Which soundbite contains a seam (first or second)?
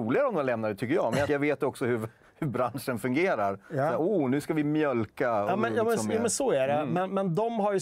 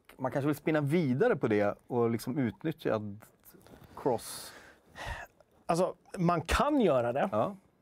first